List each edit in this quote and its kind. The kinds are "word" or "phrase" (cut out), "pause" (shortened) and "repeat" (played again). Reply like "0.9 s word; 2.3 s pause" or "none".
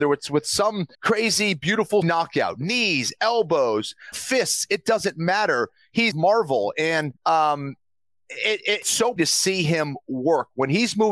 0.9 s pause; 2.0 s phrase; 4.1 s word; 6.1 s phrase; 7.2 s pause; 8.8 s word; 9.2 s word